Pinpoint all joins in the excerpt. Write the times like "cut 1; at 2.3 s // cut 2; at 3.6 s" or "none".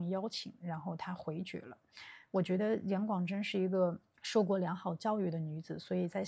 cut 1; at 4.1 s